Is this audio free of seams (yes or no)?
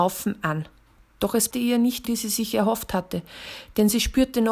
no